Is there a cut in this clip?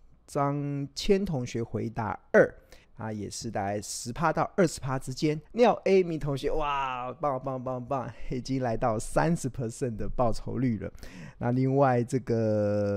yes; 2 cuts; at 2.8 s, 5.4 s

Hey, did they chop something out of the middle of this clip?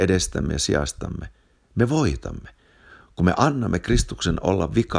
no; 0 cuts

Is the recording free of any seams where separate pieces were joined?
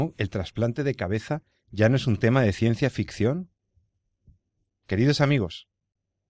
yes; 0 cuts

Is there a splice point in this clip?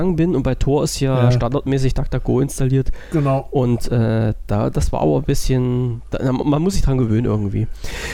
no; 0 cuts

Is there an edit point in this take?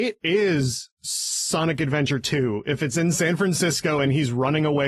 no; 0 cuts

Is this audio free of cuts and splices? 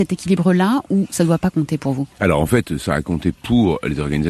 no; 1 cut; at 2.1 s

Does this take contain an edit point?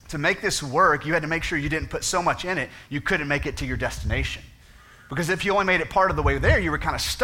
no; 0 cuts

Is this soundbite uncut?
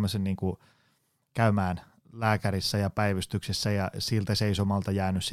yes; 0 cuts

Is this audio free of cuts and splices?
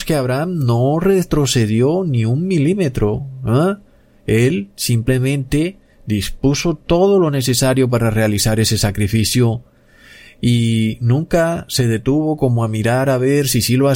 yes; 0 cuts

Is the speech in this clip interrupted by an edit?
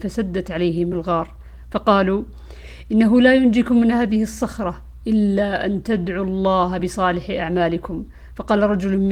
no; 0 cuts

